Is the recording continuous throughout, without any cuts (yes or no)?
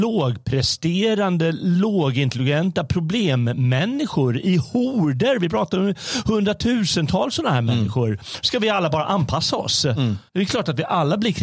no